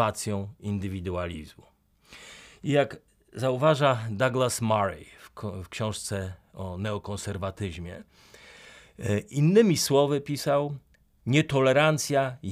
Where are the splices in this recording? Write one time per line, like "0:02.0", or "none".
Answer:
none